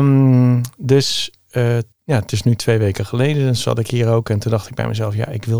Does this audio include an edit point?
yes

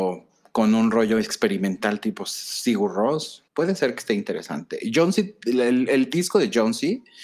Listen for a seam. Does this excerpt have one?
yes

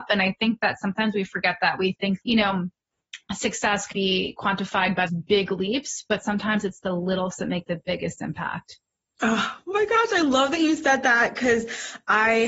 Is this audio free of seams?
no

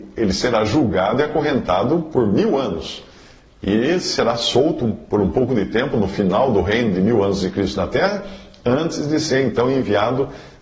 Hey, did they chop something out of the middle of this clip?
no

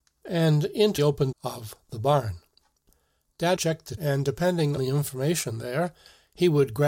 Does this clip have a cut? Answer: yes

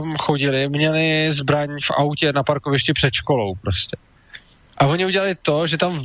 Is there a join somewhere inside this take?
no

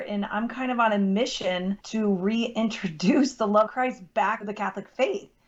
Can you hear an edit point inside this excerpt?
yes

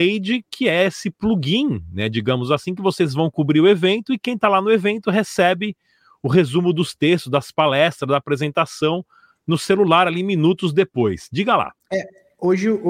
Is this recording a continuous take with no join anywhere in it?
yes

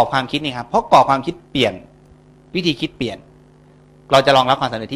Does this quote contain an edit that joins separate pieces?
no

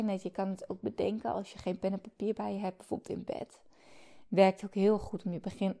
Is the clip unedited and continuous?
yes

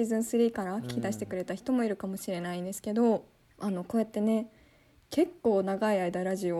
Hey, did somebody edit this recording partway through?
yes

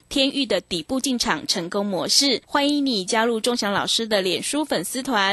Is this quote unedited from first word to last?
no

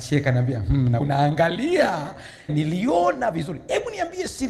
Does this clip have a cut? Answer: yes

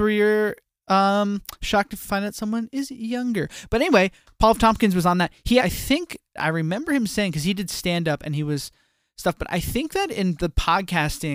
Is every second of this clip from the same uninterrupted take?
no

